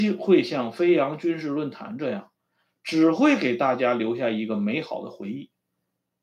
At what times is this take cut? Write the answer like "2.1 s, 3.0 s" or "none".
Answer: none